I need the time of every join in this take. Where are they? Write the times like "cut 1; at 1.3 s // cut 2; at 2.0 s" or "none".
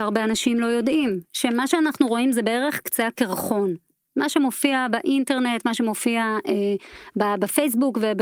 none